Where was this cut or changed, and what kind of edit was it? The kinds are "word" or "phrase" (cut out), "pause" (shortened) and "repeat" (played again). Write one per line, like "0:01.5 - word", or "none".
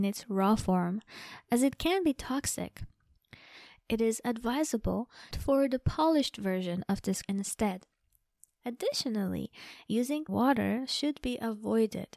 0:05.3 - phrase
0:07.2 - word
0:10.3 - phrase